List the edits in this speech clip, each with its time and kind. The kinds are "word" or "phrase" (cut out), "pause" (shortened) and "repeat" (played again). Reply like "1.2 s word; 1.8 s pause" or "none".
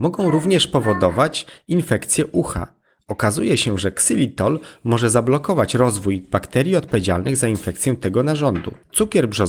none

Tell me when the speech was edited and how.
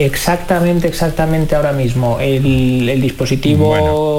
none

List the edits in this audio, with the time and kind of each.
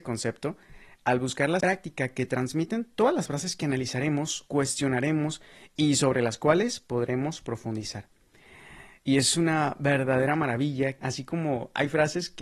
1.6 s word; 11.0 s word

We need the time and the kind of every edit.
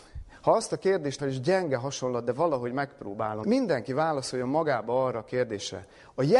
1.2 s word; 3.4 s phrase

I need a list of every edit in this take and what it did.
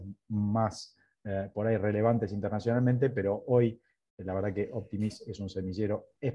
none

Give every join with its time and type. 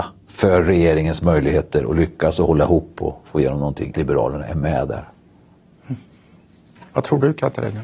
3.9 s word

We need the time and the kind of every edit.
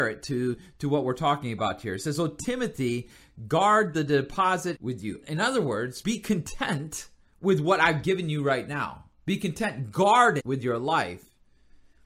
4.7 s word; 5.2 s word; 6.0 s word; 7.2 s pause; 10.4 s word

